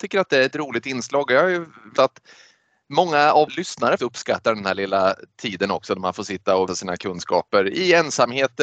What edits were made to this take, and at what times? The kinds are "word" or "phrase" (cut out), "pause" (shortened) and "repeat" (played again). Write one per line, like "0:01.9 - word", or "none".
0:02.0 - phrase
0:03.5 - word
0:04.0 - word
0:06.7 - word